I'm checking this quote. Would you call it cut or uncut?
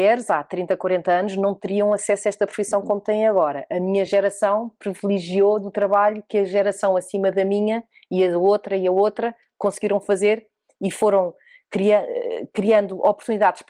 uncut